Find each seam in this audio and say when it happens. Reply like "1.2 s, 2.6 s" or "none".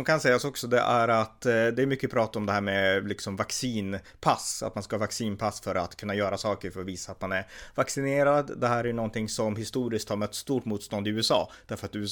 none